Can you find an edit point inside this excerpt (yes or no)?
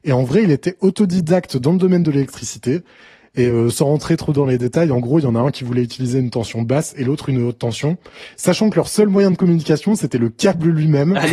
no